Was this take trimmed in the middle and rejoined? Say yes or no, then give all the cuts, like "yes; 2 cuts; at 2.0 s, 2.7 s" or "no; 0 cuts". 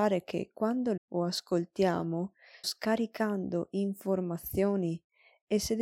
yes; 2 cuts; at 1.0 s, 2.6 s